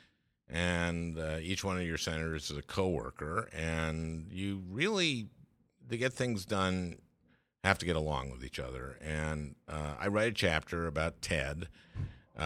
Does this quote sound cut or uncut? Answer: uncut